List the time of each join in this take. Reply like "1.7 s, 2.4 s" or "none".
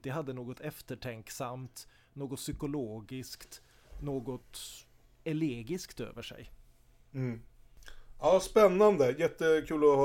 none